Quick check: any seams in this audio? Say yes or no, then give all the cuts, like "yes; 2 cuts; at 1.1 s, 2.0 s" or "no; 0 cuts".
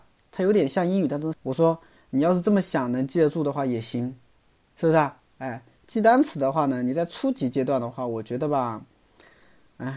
yes; 1 cut; at 1.3 s